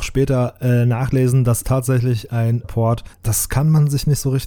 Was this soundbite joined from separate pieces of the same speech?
yes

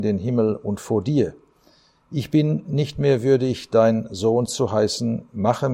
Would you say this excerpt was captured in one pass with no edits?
yes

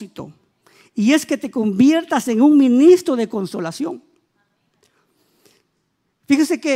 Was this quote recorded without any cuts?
yes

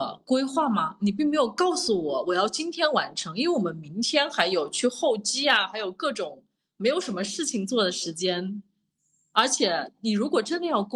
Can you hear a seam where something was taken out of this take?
no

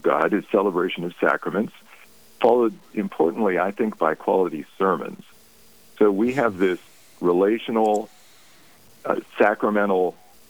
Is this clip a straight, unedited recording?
yes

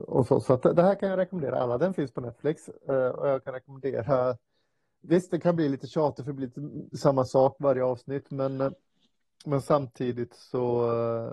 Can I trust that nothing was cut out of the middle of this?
yes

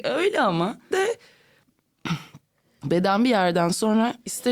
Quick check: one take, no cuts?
no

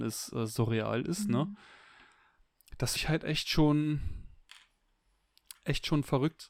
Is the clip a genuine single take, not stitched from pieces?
no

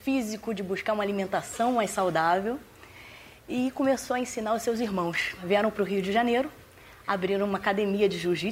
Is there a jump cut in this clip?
no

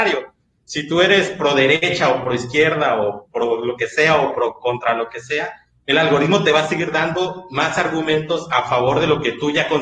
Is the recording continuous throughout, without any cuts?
yes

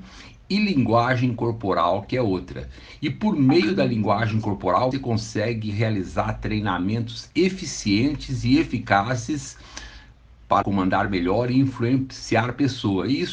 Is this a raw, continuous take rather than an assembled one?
no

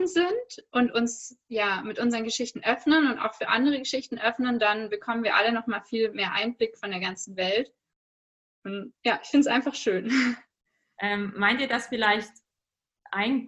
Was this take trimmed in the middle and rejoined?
no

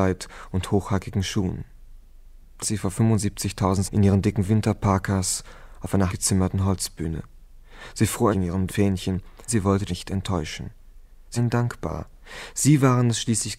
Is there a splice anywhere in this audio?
yes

